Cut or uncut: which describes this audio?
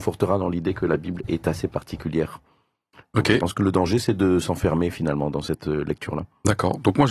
uncut